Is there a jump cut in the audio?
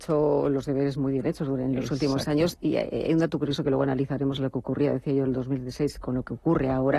no; 0 cuts

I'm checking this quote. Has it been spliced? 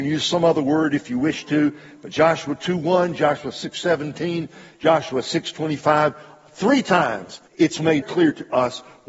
yes; 2 cuts; at 7.5 s, 8.0 s

